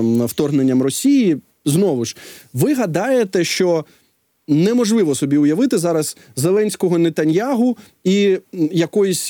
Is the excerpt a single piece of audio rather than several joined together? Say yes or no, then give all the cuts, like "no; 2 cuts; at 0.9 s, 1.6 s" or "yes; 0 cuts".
yes; 0 cuts